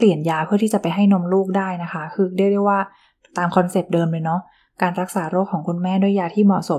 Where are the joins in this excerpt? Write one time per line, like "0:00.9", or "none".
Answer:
none